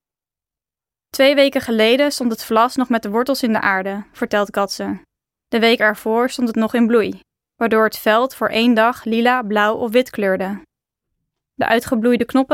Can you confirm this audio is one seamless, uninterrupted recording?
yes; 0 cuts

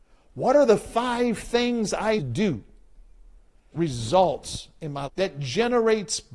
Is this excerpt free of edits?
no; 3 cuts; at 2.2 s, 3.7 s, 5.1 s

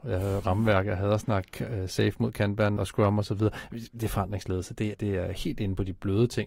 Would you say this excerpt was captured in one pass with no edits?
no; 2 cuts; at 2.8 s, 4.9 s

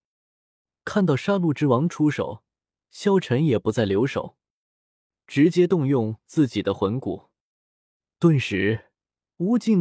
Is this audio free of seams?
yes; 0 cuts

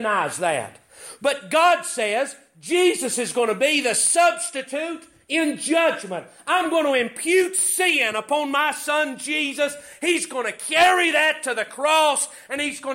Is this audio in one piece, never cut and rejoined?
yes; 0 cuts

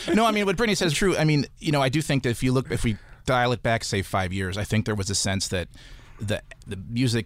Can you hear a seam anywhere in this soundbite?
yes; 1 cut; at 0.9 s

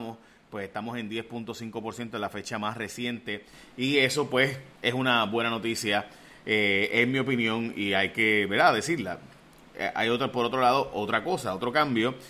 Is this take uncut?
no; 1 cut; at 4.8 s

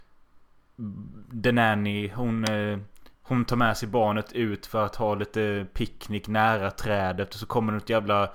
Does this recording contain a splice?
yes; 1 cut; at 3.1 s

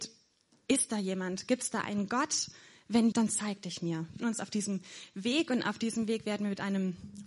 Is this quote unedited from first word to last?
no; 2 cuts; at 3.1 s, 4.2 s

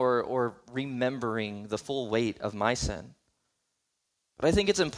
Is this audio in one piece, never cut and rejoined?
yes; 0 cuts

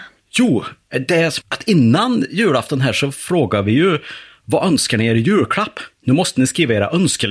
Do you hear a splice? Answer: yes; 1 cut; at 1.4 s

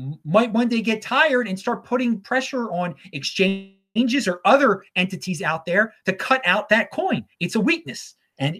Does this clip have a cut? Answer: no; 0 cuts

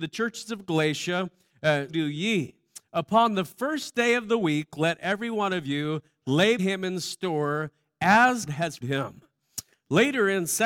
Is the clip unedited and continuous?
no; 4 cuts; at 1.9 s, 6.6 s, 8.5 s, 8.8 s

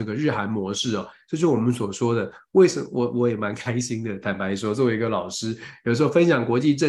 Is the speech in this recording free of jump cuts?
yes; 0 cuts

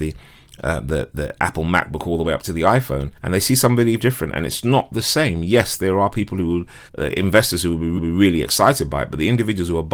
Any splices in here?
yes; 5 cuts; at 3.1 s, 4.0 s, 4.6 s, 6.9 s, 8.0 s

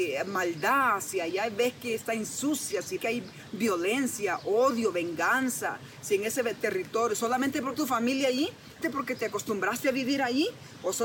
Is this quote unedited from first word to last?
no; 3 cuts; at 3.0 s, 7.7 s, 8.8 s

